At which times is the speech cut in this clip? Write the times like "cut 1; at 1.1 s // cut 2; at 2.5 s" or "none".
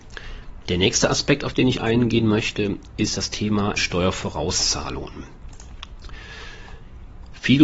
cut 1; at 3.8 s